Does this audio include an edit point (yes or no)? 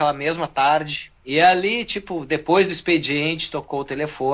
yes